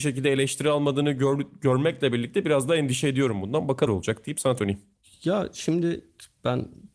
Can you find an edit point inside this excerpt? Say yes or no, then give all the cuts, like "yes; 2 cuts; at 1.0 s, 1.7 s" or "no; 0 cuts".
yes; 2 cuts; at 3.9 s, 4.6 s